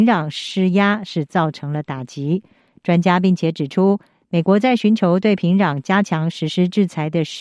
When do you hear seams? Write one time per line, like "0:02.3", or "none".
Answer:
none